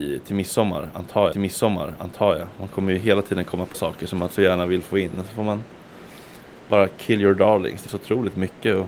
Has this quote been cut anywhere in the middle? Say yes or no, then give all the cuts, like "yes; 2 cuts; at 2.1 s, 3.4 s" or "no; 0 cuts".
yes; 3 cuts; at 1.3 s, 3.7 s, 7.9 s